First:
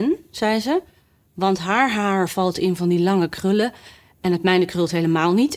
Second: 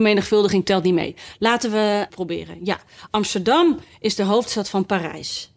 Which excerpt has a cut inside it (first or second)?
second